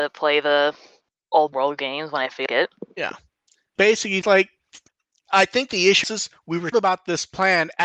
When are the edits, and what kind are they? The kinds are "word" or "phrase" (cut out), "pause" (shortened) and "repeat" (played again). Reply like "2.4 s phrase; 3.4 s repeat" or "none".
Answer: 1.5 s word; 2.5 s word; 3.8 s word; 4.2 s word; 6.0 s word; 6.7 s word